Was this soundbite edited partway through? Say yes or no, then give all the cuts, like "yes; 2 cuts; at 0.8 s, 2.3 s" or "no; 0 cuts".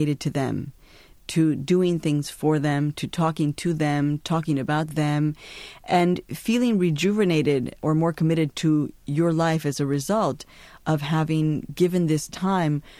no; 0 cuts